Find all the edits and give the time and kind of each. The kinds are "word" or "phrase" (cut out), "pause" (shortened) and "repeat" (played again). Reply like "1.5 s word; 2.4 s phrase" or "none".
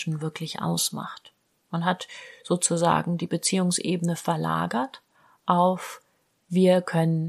none